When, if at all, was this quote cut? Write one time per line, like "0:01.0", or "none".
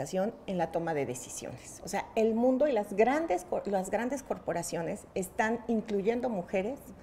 none